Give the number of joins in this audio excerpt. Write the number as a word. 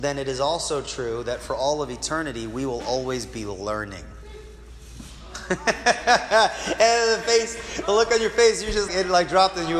one